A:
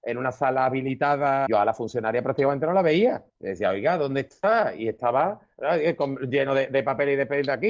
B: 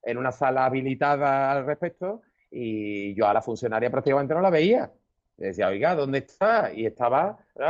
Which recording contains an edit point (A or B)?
A